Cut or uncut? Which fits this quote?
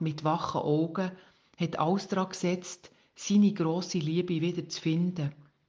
uncut